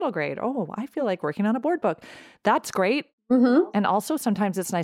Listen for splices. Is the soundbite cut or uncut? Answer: uncut